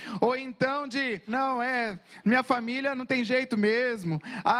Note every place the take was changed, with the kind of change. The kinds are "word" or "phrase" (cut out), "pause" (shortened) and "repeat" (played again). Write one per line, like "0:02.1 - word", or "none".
0:01.3 - word